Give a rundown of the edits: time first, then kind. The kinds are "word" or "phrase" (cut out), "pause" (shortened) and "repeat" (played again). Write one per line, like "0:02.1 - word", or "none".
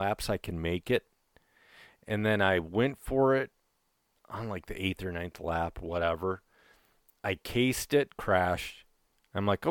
none